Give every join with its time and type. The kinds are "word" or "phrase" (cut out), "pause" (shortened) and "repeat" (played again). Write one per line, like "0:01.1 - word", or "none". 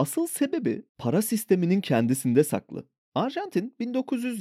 none